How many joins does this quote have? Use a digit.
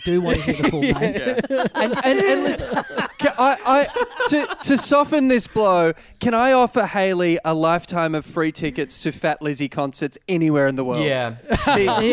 0